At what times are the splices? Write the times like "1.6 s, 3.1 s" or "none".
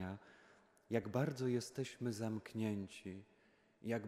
none